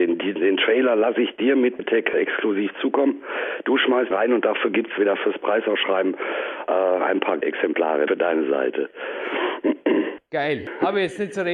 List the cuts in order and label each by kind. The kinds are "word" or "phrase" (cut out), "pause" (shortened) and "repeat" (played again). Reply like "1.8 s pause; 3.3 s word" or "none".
1.8 s word; 2.1 s word; 4.1 s word; 5.0 s word; 7.4 s word; 8.1 s word